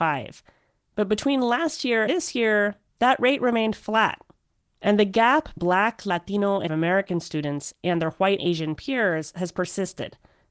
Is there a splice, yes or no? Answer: yes